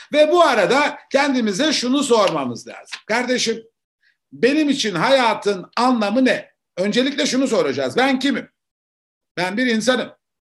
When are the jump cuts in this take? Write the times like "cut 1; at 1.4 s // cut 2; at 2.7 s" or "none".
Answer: none